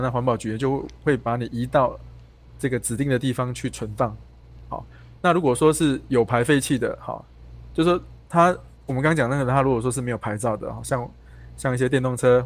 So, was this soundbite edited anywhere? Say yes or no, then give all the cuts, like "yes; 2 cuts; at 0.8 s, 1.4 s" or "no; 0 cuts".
no; 0 cuts